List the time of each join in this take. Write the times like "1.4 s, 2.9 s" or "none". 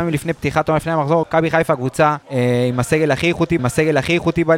1.2 s, 2.2 s, 3.6 s